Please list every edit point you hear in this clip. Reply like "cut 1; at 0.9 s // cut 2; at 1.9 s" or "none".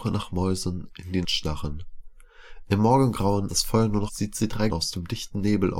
cut 1; at 1.2 s // cut 2; at 3.5 s // cut 3; at 4.1 s // cut 4; at 4.7 s